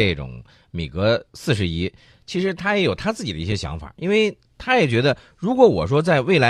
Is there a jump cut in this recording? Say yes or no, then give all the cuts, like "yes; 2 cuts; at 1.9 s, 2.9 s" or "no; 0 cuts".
no; 0 cuts